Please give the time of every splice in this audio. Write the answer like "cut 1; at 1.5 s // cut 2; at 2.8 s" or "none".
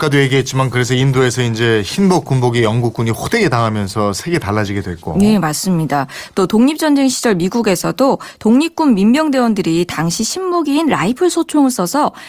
none